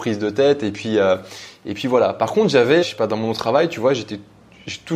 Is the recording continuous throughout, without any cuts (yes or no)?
no